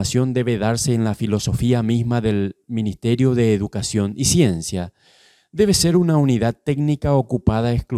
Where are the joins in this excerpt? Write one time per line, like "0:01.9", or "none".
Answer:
none